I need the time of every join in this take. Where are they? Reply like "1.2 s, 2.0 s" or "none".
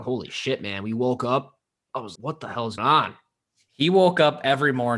2.2 s, 2.8 s